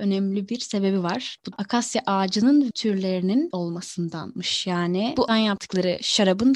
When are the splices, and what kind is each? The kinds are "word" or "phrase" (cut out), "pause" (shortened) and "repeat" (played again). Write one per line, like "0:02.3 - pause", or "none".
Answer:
0:01.5 - word
0:02.7 - word
0:03.5 - word
0:05.3 - word